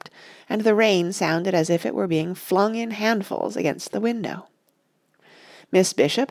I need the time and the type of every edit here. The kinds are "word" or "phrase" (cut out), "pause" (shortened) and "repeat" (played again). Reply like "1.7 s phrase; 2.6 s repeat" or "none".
none